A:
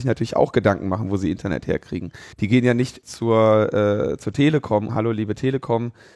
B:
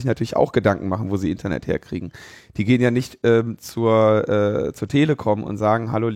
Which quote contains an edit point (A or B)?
A